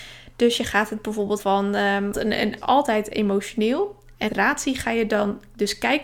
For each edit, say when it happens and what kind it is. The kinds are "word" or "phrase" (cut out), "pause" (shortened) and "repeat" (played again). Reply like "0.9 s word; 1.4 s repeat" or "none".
1.4 s word; 2.1 s word; 2.6 s word; 4.3 s word